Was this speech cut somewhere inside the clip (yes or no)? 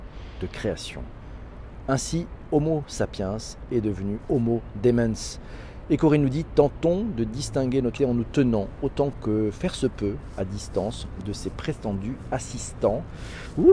yes